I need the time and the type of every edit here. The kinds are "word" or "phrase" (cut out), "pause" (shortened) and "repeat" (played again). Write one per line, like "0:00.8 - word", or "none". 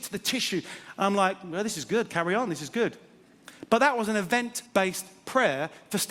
0:04.7 - pause